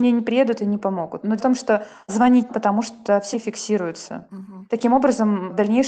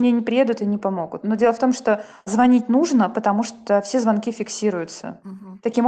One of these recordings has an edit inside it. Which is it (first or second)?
first